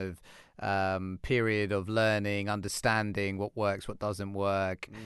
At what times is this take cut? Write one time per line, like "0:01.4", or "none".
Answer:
none

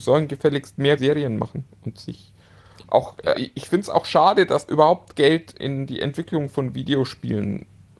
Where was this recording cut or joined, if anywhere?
0:01.0
0:03.3
0:04.7
0:05.6

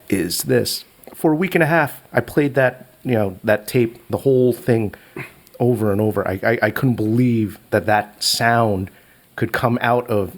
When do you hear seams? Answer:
0:02.0

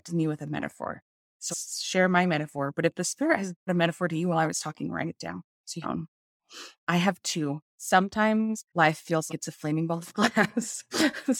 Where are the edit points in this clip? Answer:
0:01.5
0:03.7
0:05.5
0:05.8
0:08.7
0:09.3

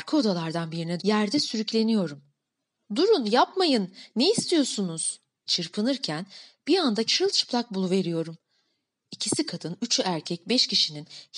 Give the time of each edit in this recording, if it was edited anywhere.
0:01.0
0:05.5
0:07.1

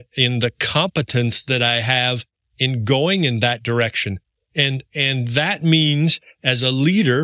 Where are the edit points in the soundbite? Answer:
none

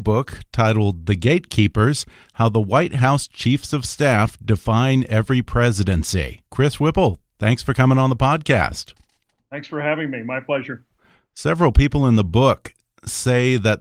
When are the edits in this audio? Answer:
0:06.5

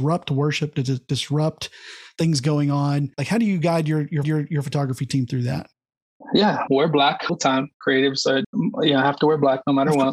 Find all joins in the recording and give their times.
0:03.1
0:04.2
0:06.7
0:07.3
0:08.4

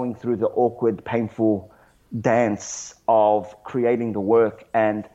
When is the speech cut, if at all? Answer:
none

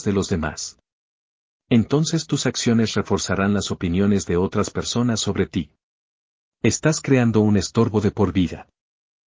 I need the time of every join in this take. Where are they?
none

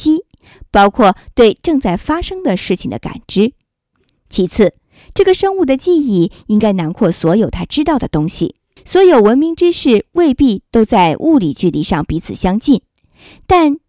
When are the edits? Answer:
0:03.9
0:08.8

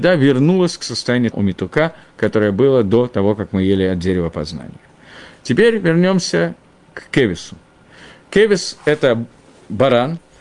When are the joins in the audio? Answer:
0:01.3

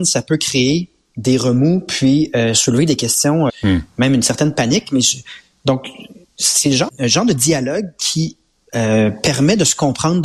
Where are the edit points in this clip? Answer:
0:03.5
0:06.9

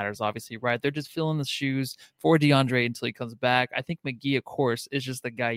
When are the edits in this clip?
none

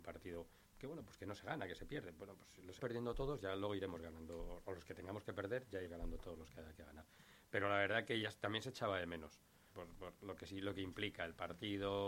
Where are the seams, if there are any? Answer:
0:02.8
0:05.8
0:08.2
0:09.7

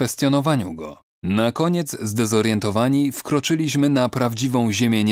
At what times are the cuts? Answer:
0:01.1

